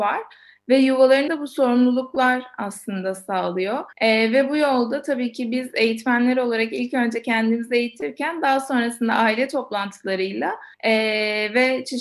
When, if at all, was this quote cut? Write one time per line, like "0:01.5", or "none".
0:01.3
0:03.9
0:10.7